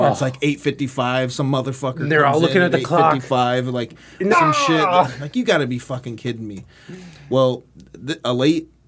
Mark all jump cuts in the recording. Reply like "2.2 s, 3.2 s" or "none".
4.3 s